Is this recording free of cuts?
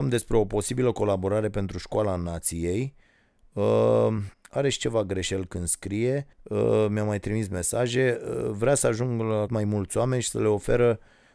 no; 3 cuts; at 4.3 s, 6.3 s, 9.5 s

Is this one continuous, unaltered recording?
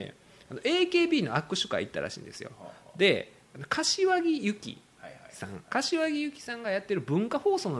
no; 1 cut; at 5.6 s

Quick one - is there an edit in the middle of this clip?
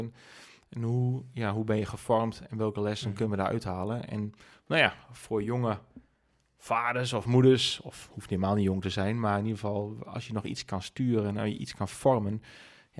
no; 0 cuts

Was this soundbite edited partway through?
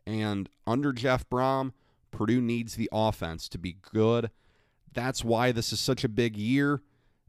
no; 0 cuts

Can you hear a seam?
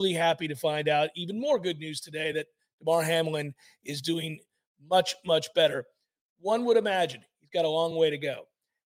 no; 0 cuts

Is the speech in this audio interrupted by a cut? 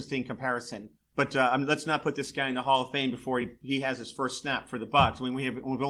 no; 0 cuts

